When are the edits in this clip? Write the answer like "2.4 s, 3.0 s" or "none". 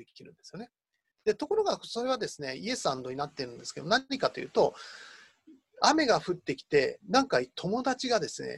none